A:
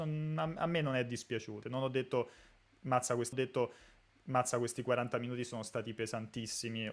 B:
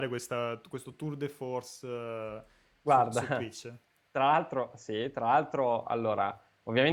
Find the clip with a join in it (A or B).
A